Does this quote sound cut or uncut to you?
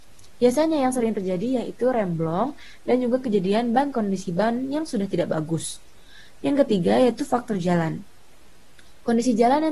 cut